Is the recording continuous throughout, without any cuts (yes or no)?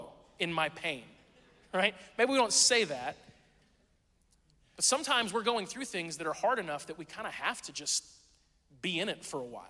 yes